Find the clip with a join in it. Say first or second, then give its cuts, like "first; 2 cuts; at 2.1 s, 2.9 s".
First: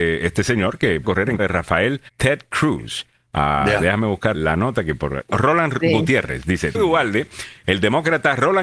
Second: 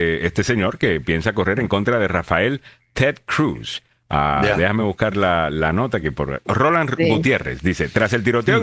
first; 5 cuts; at 1.0 s, 1.4 s, 2.1 s, 4.3 s, 6.7 s